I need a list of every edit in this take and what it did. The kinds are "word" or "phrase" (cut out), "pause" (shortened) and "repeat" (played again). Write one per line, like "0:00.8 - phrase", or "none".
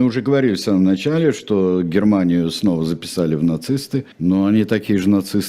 0:04.1 - pause